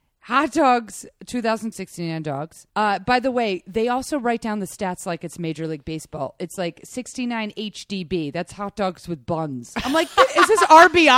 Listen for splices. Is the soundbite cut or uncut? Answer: cut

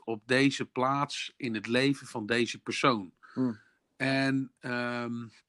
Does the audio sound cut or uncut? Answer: cut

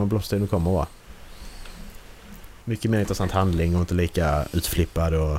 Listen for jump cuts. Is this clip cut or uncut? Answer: uncut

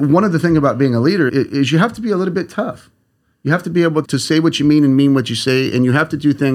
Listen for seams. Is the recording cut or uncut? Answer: cut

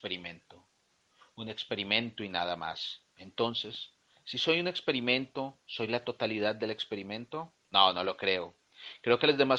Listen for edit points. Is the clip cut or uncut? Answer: cut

